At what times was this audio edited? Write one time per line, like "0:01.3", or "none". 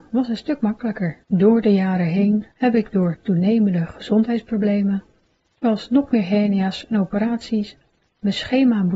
0:01.2
0:02.5

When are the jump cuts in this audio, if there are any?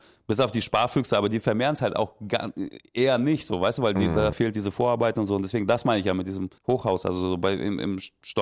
0:04.3
0:06.6

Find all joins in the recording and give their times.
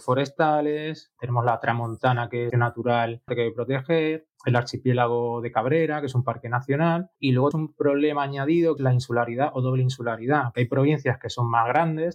0:01.2
0:02.5
0:03.3
0:04.3
0:07.1
0:07.5
0:08.8
0:10.5

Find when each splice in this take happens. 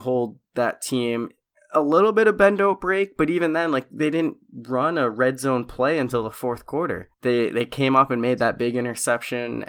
0:01.5
0:07.1

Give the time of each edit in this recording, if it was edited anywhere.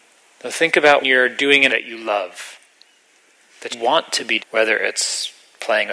0:01.0
0:01.7
0:03.7
0:04.4

